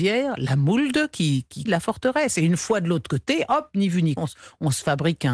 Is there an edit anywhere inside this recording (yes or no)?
yes